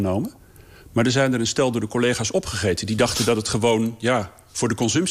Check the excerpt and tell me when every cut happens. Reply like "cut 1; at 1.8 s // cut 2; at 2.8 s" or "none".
none